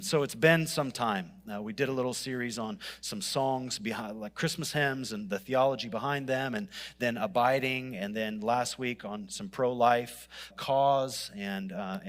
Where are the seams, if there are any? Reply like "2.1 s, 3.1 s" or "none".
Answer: 10.5 s